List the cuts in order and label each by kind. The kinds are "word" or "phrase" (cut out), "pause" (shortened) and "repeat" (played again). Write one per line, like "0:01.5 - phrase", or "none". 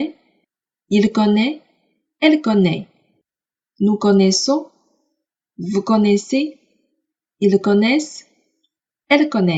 none